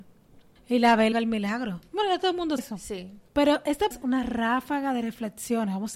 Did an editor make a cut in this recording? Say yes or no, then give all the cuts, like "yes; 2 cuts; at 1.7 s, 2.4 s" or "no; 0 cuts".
yes; 5 cuts; at 1.1 s, 1.9 s, 2.6 s, 3.3 s, 3.9 s